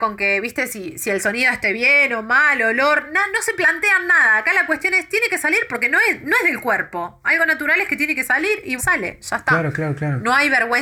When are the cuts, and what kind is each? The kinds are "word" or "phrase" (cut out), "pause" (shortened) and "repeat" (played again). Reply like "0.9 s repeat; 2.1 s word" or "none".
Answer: 8.8 s word